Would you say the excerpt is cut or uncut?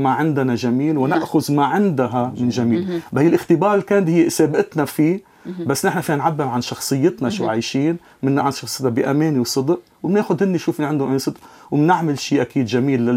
cut